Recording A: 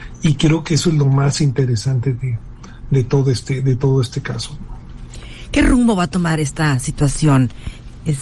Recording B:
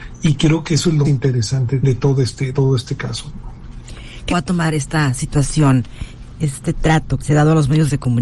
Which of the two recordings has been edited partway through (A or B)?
B